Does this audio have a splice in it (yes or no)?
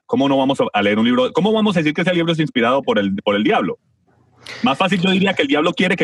no